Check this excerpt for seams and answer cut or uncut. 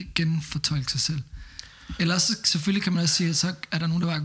uncut